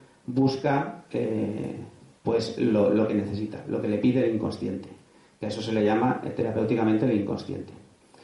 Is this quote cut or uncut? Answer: uncut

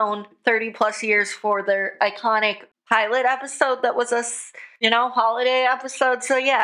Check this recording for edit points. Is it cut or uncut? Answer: uncut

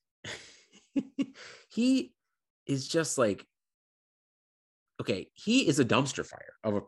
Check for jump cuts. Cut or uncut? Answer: uncut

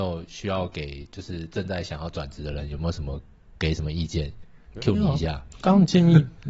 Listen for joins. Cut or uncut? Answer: uncut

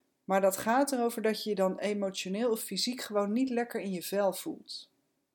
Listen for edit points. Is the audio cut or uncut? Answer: uncut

